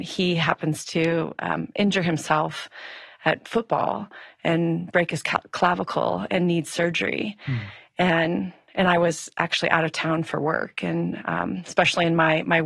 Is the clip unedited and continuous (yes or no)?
yes